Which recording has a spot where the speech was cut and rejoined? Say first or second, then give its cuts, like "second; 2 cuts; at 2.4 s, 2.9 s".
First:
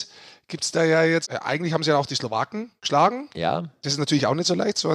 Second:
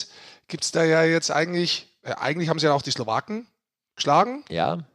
first; 2 cuts; at 1.2 s, 2.8 s